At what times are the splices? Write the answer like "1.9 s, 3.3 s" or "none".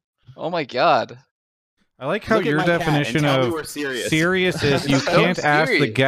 none